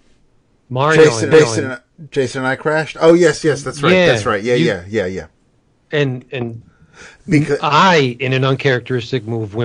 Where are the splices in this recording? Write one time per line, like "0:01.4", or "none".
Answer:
0:01.3

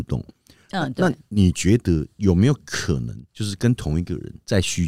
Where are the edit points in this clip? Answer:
0:03.3

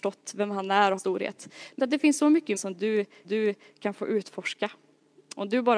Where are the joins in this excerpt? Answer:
0:01.0
0:01.8
0:02.6
0:03.2

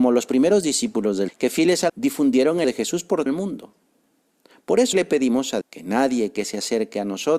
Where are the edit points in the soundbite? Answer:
0:01.3
0:01.9
0:02.6
0:03.3
0:04.9
0:05.6

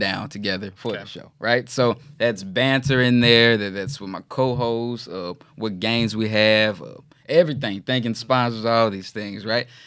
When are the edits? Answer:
none

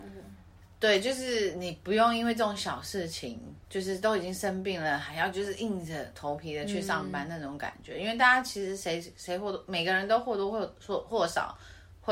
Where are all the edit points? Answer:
0:03.6

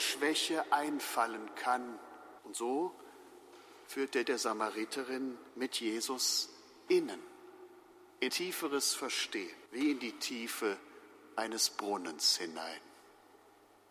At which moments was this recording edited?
0:02.4
0:04.2
0:05.5
0:06.9
0:08.3
0:09.7

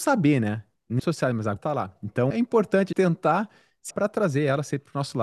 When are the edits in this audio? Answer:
0:01.0
0:01.6
0:02.3
0:02.9
0:03.9

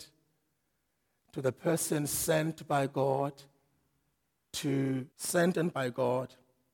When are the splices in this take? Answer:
0:05.1
0:05.7

